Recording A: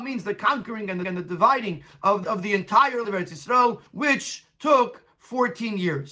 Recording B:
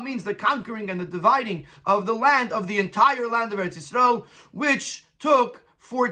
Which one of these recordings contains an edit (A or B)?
A